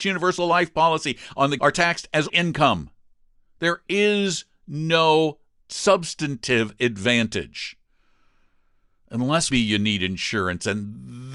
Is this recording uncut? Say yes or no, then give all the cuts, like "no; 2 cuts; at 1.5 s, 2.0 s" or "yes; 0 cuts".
no; 4 cuts; at 1.6 s, 2.3 s, 5.6 s, 9.5 s